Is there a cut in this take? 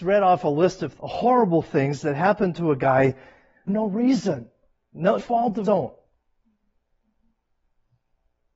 yes; 4 cuts; at 1.0 s, 3.7 s, 5.2 s, 5.6 s

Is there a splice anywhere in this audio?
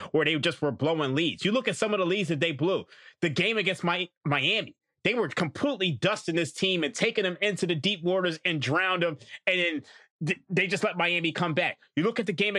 no; 0 cuts

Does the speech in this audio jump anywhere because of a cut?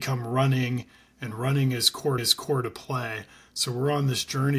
yes; 1 cut; at 2.2 s

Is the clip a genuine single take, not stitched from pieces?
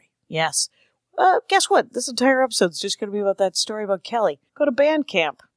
no; 1 cut; at 4.5 s

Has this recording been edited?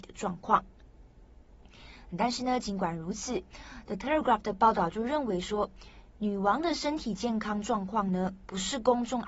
no; 0 cuts

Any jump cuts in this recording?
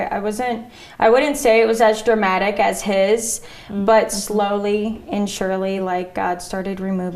no; 0 cuts

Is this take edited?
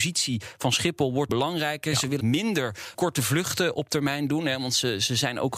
yes; 3 cuts; at 1.3 s, 2.2 s, 2.9 s

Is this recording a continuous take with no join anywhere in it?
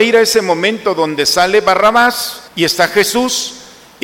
no; 1 cut; at 2.5 s

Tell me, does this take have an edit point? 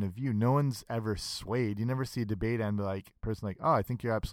no; 0 cuts

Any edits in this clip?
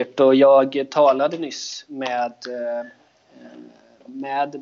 no; 0 cuts

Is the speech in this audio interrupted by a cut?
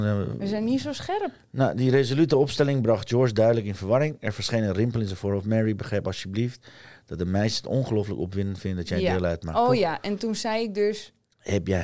no; 0 cuts

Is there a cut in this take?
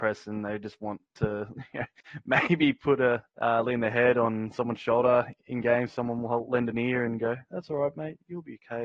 yes; 1 cut; at 3.3 s

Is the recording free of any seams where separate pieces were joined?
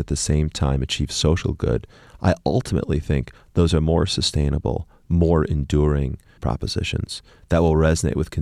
no; 1 cut; at 6.4 s

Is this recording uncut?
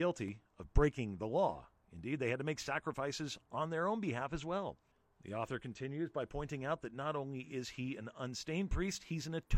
no; 1 cut; at 4.9 s

